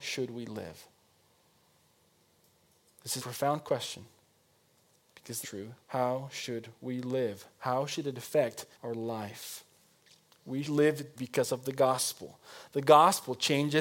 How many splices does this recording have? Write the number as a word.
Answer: six